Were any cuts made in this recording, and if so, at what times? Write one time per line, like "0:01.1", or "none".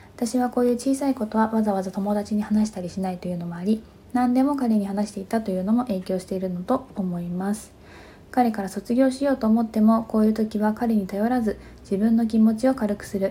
none